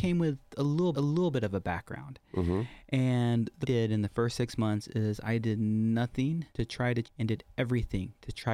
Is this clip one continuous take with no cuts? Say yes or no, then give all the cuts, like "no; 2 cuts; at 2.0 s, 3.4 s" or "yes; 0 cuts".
no; 4 cuts; at 0.9 s, 3.6 s, 6.5 s, 7.0 s